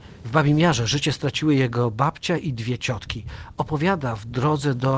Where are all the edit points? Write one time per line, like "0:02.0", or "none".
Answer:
none